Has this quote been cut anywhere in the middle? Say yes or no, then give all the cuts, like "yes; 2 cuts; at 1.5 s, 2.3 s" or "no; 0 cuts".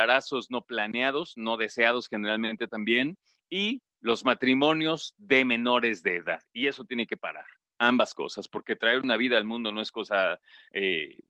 no; 0 cuts